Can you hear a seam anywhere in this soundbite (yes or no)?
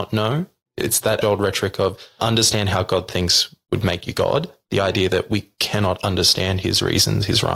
yes